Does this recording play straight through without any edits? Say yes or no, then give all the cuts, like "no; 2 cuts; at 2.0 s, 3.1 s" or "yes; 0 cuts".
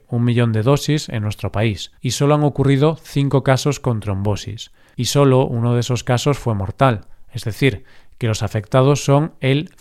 no; 1 cut; at 1.9 s